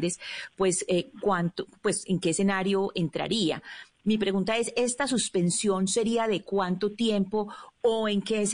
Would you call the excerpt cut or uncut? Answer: uncut